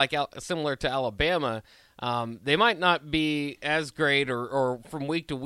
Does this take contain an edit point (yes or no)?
no